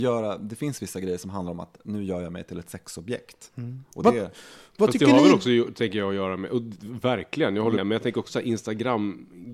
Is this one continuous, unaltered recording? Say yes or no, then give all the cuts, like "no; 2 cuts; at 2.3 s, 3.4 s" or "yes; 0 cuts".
no; 2 cuts; at 7.8 s, 8.3 s